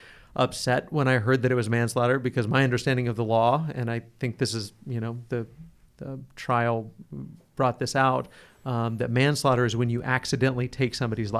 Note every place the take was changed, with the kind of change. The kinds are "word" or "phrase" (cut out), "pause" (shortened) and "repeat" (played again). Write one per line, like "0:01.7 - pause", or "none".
none